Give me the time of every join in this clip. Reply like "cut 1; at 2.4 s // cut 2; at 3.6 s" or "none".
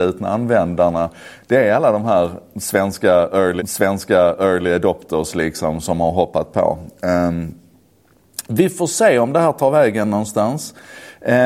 cut 1; at 3.6 s // cut 2; at 5.8 s

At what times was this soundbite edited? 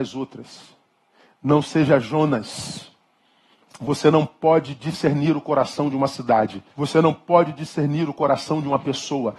cut 1; at 6.7 s

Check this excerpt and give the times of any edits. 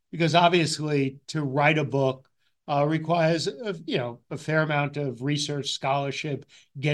none

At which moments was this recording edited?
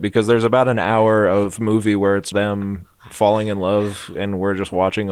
cut 1; at 2.3 s

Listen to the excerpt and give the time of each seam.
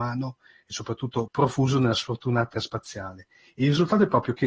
cut 1; at 1.3 s // cut 2; at 2.5 s

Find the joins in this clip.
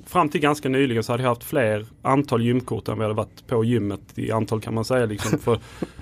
cut 1; at 1.9 s // cut 2; at 4.6 s

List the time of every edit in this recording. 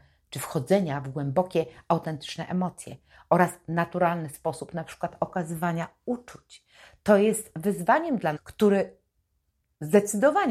cut 1; at 8.4 s

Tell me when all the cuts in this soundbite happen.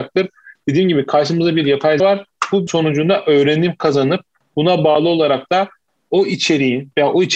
cut 1; at 2.0 s // cut 2; at 2.7 s

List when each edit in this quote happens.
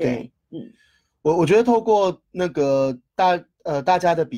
cut 1; at 3.1 s

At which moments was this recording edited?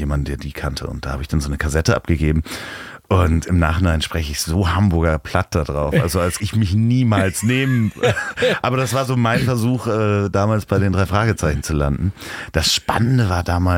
cut 1; at 6.4 s

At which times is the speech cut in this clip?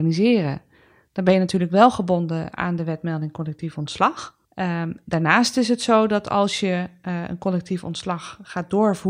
cut 1; at 4.5 s

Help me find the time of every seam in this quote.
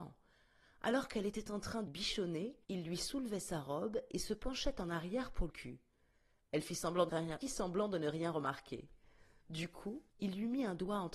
cut 1; at 1.9 s // cut 2; at 2.6 s // cut 3; at 5.5 s // cut 4; at 7.1 s // cut 5; at 7.4 s // cut 6; at 10.1 s

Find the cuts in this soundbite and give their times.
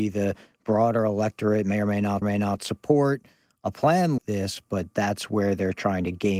cut 1; at 2.2 s // cut 2; at 4.2 s

